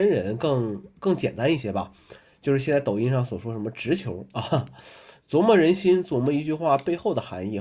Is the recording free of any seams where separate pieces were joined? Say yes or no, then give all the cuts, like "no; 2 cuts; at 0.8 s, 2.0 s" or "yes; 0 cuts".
yes; 0 cuts